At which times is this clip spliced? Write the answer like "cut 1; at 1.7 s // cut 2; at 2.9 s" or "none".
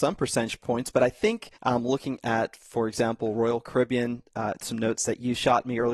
cut 1; at 1.6 s